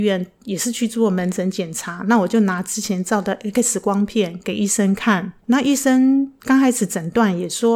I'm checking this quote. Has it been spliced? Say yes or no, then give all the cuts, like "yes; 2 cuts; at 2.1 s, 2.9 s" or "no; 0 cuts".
yes; 1 cut; at 5.4 s